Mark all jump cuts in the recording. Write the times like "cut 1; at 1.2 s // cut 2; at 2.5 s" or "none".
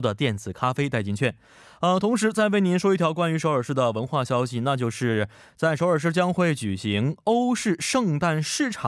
none